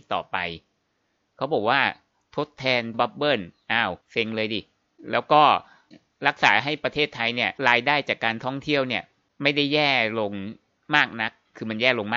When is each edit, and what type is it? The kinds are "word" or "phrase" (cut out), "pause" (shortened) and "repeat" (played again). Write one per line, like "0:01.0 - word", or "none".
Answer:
0:02.9 - word
0:04.0 - pause
0:07.6 - pause